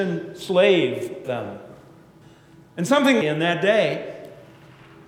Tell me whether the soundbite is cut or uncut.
cut